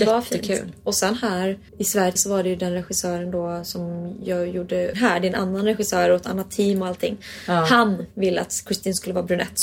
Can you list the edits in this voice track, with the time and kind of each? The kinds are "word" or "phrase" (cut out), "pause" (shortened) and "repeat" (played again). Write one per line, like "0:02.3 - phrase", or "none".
0:01.7 - pause
0:02.2 - word
0:04.9 - word